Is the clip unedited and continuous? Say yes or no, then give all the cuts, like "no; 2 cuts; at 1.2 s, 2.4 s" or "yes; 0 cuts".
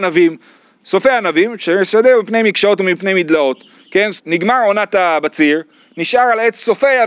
no; 1 cut; at 4.2 s